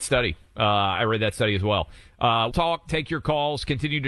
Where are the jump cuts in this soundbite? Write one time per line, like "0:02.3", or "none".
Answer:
0:02.5